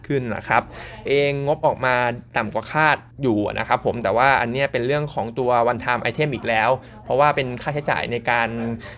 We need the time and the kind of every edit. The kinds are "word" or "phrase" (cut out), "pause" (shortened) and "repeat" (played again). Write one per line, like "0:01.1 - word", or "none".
0:01.1 - word
0:03.1 - pause